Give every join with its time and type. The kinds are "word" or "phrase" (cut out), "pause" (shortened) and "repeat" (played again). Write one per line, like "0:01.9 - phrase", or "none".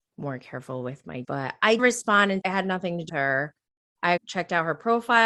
0:01.2 - word
0:01.8 - word
0:02.4 - word
0:03.1 - word
0:04.2 - word